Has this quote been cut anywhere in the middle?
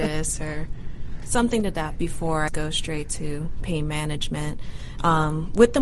yes; 2 cuts; at 2.0 s, 2.5 s

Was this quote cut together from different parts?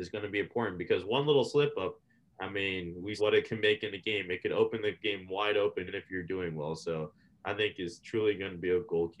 yes; 2 cuts; at 3.2 s, 5.9 s

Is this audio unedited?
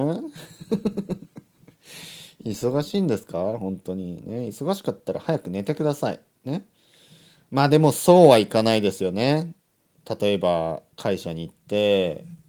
no; 1 cut; at 10.9 s

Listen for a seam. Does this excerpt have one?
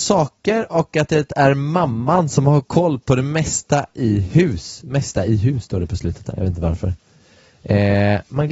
no; 0 cuts

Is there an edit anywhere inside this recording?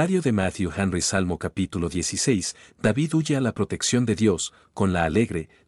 no; 0 cuts

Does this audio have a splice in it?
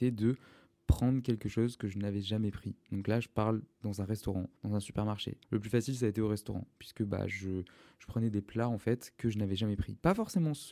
yes; 2 cuts; at 4.6 s, 5.4 s

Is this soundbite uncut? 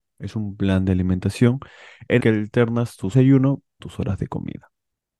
no; 3 cuts; at 2.2 s, 3.1 s, 3.8 s

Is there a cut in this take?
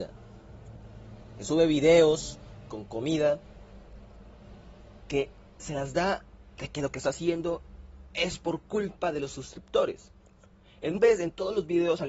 yes; 2 cuts; at 5.0 s, 11.0 s

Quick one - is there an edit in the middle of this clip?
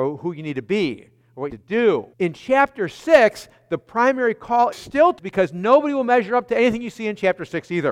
yes; 4 cuts; at 1.5 s, 2.1 s, 4.7 s, 5.2 s

